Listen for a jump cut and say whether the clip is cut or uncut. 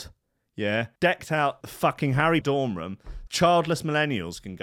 cut